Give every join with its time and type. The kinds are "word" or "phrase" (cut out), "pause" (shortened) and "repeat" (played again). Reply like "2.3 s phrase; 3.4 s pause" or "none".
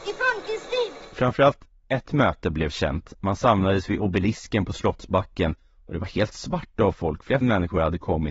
7.4 s word